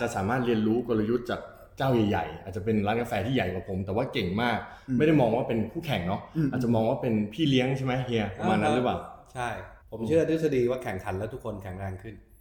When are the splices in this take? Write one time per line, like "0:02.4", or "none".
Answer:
0:09.8